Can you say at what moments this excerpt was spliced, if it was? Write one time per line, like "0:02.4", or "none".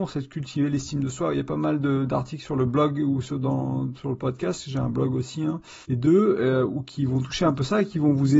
0:05.8